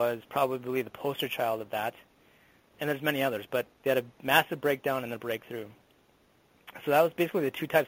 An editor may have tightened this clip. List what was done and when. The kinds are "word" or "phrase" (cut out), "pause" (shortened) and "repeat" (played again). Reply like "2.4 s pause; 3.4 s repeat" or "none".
2.7 s word; 3.7 s pause